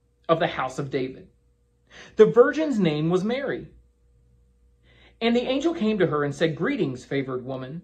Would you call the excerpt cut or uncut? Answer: uncut